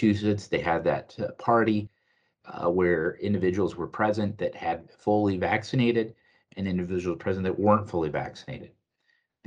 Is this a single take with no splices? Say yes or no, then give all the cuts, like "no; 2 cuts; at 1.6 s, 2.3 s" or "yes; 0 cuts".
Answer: yes; 0 cuts